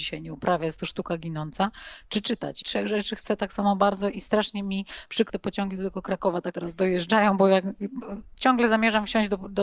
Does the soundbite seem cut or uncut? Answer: cut